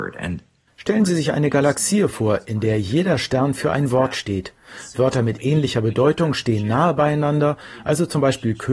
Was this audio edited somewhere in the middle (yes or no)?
no